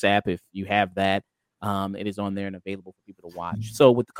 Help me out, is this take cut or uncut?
uncut